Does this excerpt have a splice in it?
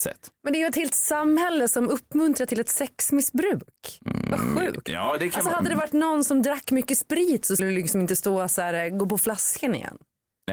yes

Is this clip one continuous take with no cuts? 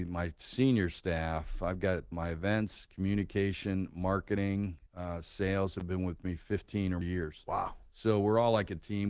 no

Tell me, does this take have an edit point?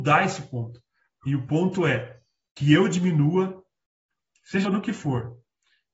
yes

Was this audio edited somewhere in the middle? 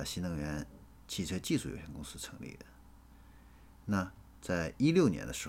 no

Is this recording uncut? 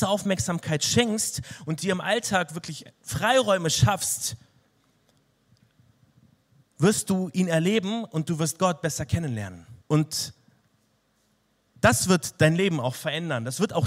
no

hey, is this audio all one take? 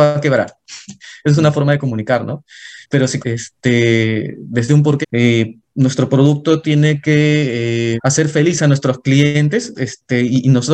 no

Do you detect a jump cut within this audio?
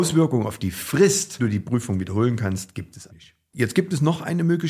yes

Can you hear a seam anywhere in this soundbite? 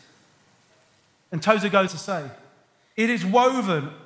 yes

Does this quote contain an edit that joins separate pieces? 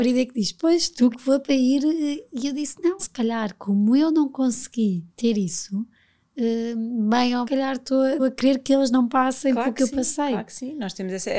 yes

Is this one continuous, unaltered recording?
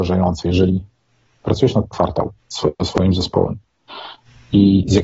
no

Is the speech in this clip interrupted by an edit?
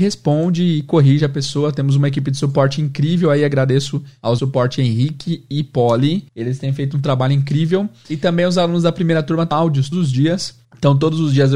yes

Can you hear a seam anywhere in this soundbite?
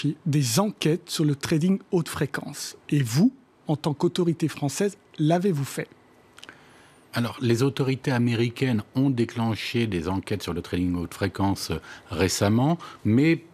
no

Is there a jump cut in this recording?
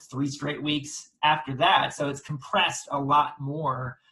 no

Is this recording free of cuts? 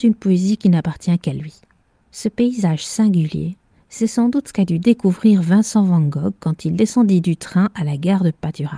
yes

